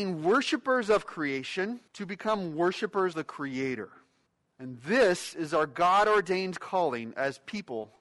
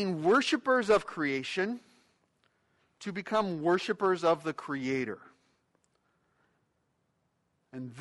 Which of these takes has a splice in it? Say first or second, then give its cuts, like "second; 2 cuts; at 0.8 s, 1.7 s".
first; 3 cuts; at 1.9 s, 3.1 s, 4.3 s